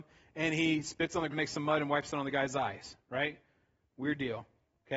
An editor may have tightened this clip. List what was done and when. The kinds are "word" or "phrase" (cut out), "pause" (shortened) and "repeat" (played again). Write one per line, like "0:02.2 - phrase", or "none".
0:01.3 - word